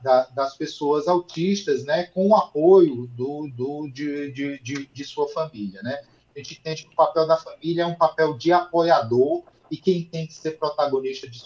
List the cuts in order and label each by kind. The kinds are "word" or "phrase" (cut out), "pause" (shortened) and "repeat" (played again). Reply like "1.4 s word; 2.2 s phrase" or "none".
3.5 s repeat